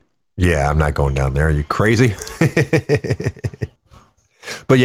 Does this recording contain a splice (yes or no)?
yes